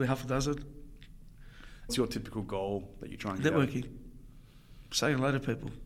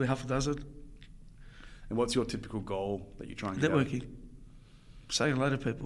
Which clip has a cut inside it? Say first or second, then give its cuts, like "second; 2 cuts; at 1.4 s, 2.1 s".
first; 1 cut; at 1.9 s